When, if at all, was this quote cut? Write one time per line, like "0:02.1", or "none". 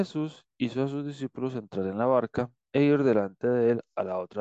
none

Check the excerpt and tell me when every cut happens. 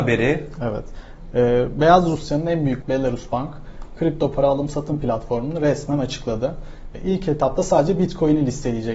0:02.8

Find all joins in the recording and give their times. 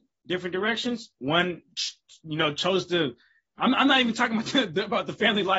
none

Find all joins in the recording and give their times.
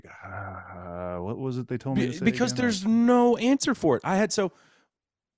none

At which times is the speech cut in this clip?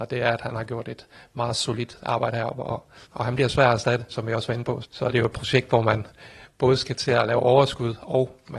0:03.0
0:04.1
0:04.8

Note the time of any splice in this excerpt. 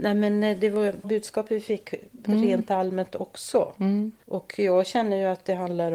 0:01.0

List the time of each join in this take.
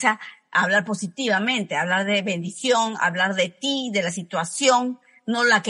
none

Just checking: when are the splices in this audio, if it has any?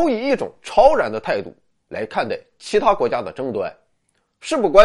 none

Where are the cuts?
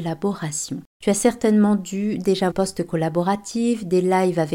0:02.5

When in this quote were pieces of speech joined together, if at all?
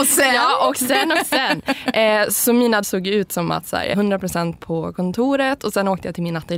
0:02.8
0:03.9

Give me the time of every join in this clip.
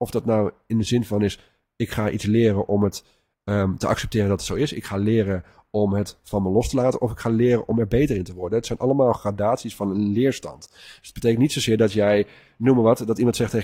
none

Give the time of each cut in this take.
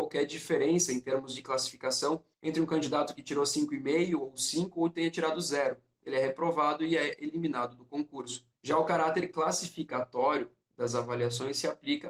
0:02.3
0:08.5

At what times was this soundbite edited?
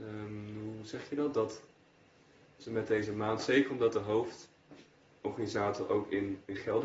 none

